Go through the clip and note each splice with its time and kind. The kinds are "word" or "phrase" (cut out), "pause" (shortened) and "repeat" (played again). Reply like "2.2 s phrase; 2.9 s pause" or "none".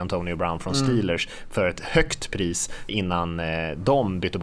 2.9 s word

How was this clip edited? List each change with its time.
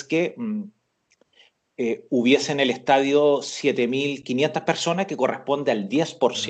none

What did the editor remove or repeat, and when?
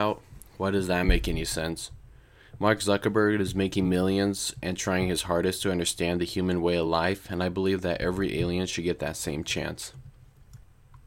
none

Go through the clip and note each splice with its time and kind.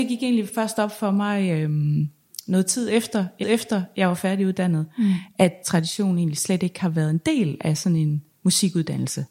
3.4 s repeat; 5.6 s phrase

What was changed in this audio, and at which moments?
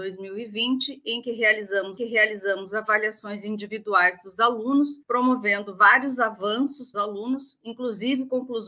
2.0 s repeat; 5.0 s pause; 6.9 s word

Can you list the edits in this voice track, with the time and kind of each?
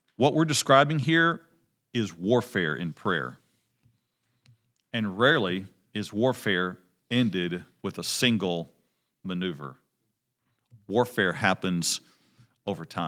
none

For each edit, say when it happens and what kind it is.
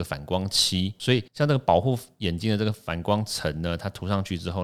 1.3 s pause

